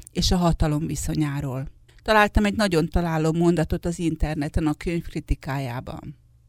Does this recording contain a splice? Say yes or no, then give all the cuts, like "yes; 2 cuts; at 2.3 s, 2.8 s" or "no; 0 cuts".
yes; 1 cut; at 1.9 s